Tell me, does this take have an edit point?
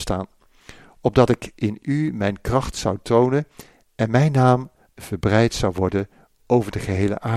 no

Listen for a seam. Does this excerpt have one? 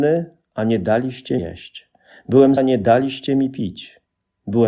yes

